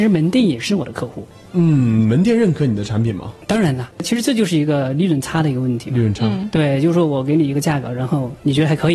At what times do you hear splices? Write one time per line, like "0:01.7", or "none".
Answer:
none